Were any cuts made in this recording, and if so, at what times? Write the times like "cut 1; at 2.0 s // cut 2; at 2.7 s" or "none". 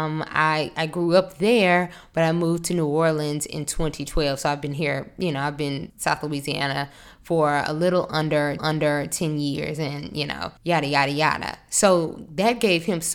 cut 1; at 5.9 s // cut 2; at 8.6 s // cut 3; at 10.6 s